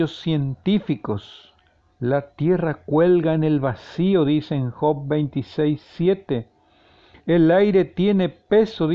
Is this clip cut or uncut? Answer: uncut